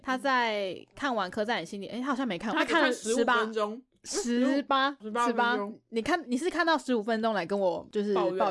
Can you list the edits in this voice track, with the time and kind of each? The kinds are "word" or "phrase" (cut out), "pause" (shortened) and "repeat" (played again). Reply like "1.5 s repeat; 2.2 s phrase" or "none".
2.5 s phrase; 5.0 s word